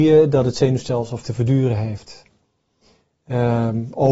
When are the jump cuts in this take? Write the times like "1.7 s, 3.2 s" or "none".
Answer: 1.2 s